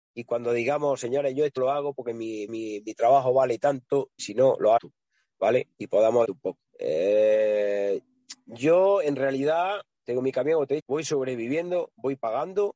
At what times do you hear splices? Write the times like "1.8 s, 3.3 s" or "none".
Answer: 1.6 s, 2.5 s, 4.2 s, 4.8 s, 5.7 s, 6.2 s, 6.7 s, 10.0 s, 10.8 s